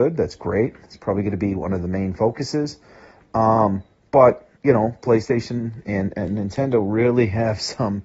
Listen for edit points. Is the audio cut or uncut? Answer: cut